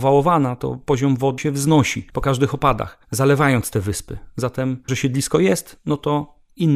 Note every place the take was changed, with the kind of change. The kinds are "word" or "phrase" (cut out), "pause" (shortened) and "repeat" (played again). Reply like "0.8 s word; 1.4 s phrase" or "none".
1.4 s word; 2.1 s pause; 3.0 s pause; 4.9 s word